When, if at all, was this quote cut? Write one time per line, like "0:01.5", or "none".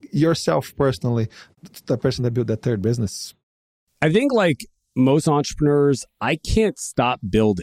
none